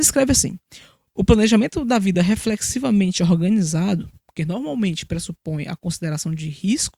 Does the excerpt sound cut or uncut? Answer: uncut